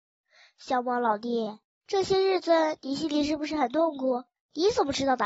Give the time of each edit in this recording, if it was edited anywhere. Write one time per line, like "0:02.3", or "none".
0:04.4